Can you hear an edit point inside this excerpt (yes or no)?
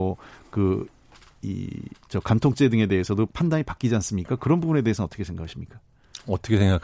no